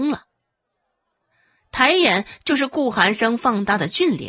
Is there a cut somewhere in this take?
no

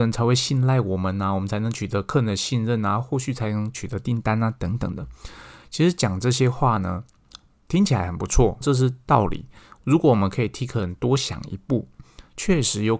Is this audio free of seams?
no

